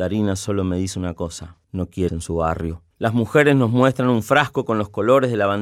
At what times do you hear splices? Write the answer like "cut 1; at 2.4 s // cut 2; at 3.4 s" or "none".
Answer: cut 1; at 1.6 s // cut 2; at 2.1 s // cut 3; at 2.9 s